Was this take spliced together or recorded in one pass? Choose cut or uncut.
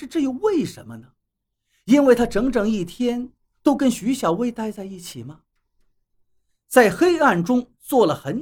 uncut